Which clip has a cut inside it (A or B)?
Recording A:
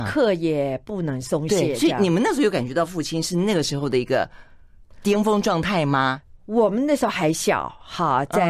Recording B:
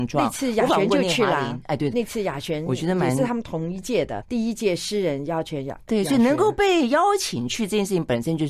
B